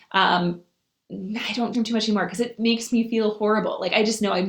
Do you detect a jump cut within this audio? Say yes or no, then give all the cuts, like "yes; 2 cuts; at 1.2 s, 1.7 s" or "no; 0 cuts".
yes; 1 cut; at 1.7 s